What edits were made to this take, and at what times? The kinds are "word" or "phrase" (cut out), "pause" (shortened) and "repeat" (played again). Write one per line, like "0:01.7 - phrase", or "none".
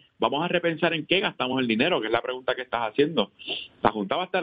none